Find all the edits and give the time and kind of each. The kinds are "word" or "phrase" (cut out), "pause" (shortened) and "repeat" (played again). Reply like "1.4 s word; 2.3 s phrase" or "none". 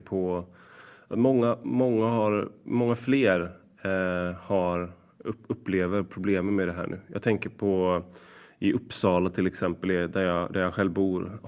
none